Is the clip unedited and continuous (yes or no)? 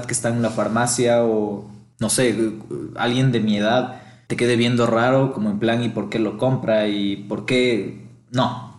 yes